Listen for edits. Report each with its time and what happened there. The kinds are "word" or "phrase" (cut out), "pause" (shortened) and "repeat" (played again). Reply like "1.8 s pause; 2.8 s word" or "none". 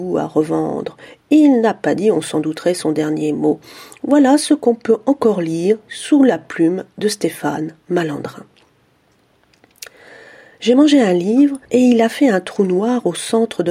11.7 s pause